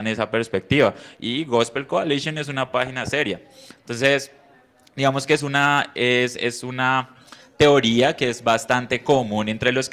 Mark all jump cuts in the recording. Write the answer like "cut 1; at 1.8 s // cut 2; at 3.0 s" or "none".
none